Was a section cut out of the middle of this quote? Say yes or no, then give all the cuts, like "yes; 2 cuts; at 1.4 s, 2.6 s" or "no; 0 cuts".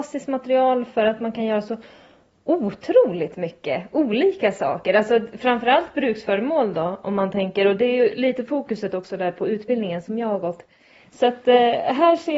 no; 0 cuts